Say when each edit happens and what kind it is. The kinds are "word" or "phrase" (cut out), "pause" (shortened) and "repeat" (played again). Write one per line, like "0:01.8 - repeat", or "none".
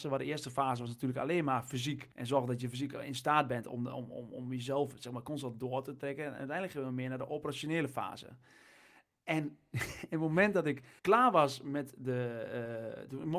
0:02.1 - pause
0:11.0 - pause